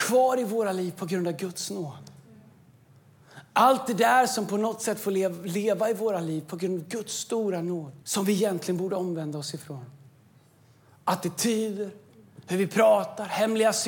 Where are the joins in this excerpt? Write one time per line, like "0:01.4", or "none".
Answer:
0:08.0